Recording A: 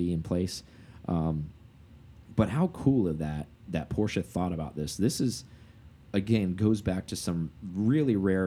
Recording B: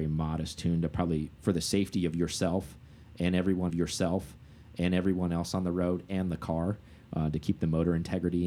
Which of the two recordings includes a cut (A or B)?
B